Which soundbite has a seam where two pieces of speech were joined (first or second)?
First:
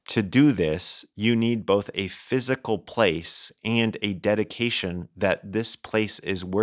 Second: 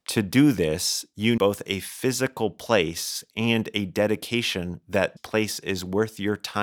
second